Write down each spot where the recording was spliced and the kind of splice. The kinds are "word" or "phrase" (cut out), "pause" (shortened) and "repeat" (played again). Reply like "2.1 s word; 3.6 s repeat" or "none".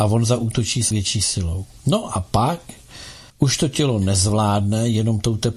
0.9 s word; 3.3 s pause

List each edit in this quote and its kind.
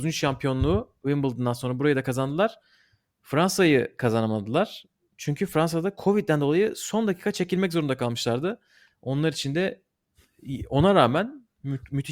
none

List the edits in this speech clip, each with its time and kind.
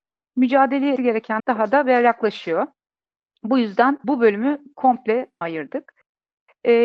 1.0 s word; 1.4 s word; 4.0 s word; 5.4 s word

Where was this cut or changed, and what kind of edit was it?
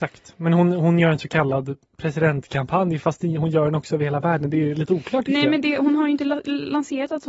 1.8 s pause

